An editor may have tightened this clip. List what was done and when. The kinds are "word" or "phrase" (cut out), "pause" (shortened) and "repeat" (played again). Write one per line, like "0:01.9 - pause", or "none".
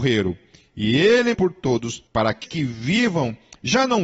0:01.3 - word
0:02.1 - pause
0:02.4 - word

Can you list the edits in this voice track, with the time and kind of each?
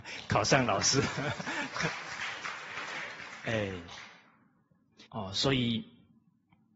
0:05.1 - pause

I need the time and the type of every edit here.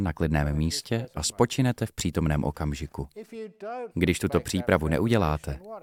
0:03.9 - pause

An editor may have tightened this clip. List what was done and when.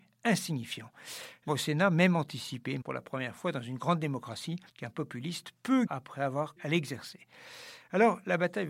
0:01.5 - word
0:02.8 - word
0:04.7 - pause
0:05.9 - phrase
0:06.6 - word

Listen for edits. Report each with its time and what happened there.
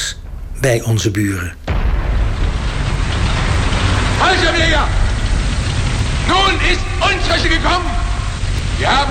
0:07.4 - word

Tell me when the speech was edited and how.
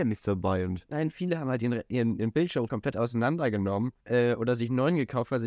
0:02.7 - word
0:04.0 - pause

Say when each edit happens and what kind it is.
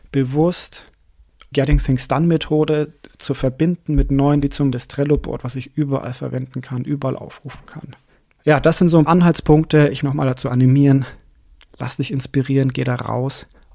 0:01.5 - word
0:04.4 - word
0:04.7 - word
0:08.1 - pause
0:09.1 - word
0:10.0 - phrase

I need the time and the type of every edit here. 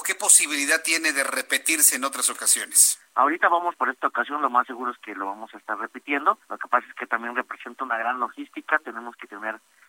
0:03.7 - phrase
0:06.4 - pause

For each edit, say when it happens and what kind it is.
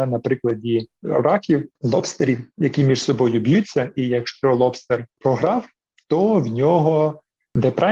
none

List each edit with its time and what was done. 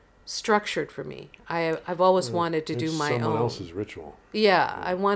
none

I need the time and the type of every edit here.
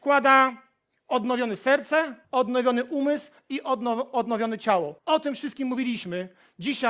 0:02.2 - pause
0:05.0 - pause

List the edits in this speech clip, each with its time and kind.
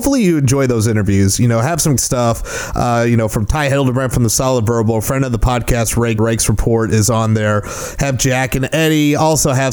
0:02.0 - word
0:06.2 - phrase

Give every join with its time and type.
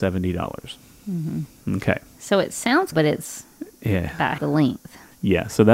0:02.9 - word
0:04.4 - word

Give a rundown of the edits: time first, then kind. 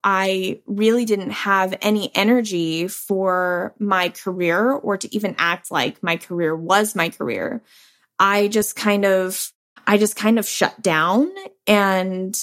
none

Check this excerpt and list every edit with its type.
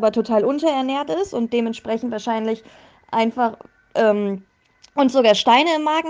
none

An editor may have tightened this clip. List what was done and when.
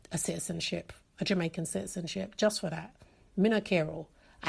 none

